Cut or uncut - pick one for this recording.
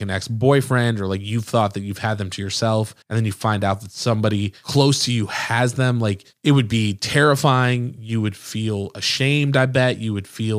cut